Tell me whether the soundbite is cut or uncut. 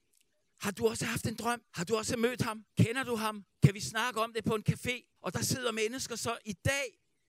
cut